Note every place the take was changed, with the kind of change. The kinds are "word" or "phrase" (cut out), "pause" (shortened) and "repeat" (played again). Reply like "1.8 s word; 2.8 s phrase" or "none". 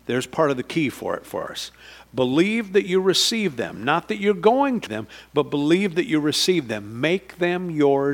4.9 s word